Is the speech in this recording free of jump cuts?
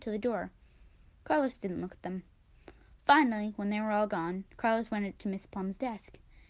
yes; 0 cuts

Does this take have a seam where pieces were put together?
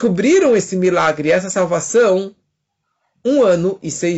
no; 0 cuts

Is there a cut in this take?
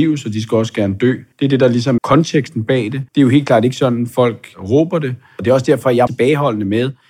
yes; 4 cuts; at 1.3 s, 2.0 s, 3.1 s, 6.1 s

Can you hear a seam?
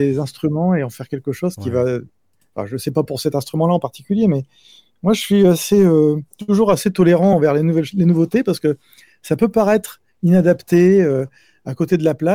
no; 0 cuts

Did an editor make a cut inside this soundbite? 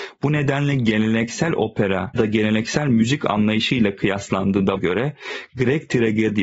yes; 2 cuts; at 2.1 s, 4.8 s

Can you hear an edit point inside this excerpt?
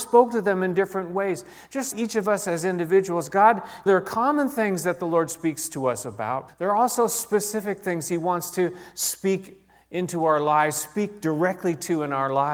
yes; 3 cuts; at 1.9 s, 3.9 s, 6.5 s

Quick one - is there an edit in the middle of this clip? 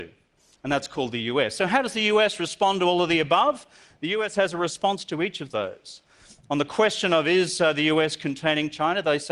no; 0 cuts

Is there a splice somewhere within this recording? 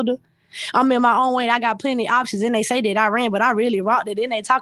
no; 0 cuts

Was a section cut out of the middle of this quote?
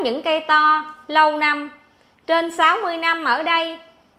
no; 0 cuts

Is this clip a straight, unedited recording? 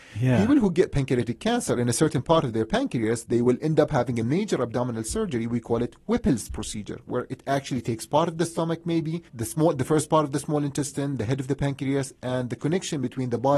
no; 1 cut; at 9.3 s

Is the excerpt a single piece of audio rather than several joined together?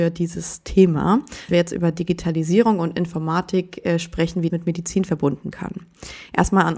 no; 3 cuts; at 1.5 s, 4.5 s, 5.5 s

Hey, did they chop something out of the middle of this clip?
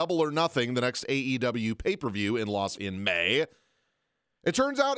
yes; 1 cut; at 2.8 s

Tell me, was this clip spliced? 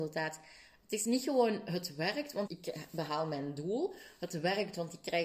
yes; 1 cut; at 2.5 s

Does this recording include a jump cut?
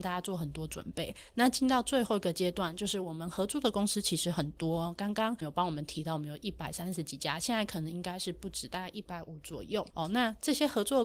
yes; 1 cut; at 5.4 s

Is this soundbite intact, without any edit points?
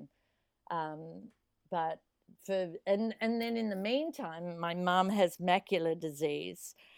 yes; 0 cuts

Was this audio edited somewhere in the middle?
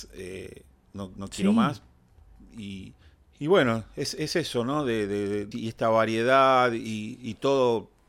yes; 2 cuts; at 3.0 s, 5.5 s

